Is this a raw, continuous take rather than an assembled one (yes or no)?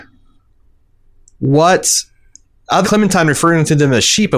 no